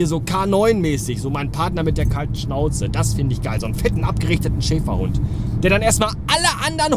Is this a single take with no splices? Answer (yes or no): yes